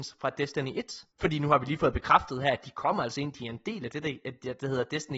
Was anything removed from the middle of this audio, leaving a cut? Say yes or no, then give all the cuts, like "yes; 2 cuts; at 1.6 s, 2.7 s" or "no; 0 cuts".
yes; 1 cut; at 1.1 s